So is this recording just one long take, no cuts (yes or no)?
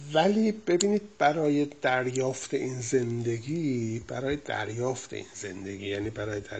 yes